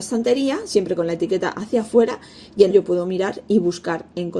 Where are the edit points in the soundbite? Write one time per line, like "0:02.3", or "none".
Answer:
0:02.7